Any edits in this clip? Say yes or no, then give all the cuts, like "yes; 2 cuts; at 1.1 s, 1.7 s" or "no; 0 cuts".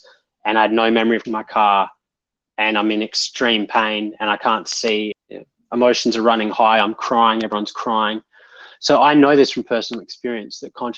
yes; 2 cuts; at 1.2 s, 5.1 s